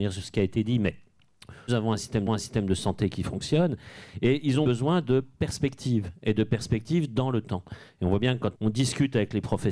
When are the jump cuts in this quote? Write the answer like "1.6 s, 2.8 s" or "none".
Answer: 1.7 s, 2.3 s, 4.6 s, 8.5 s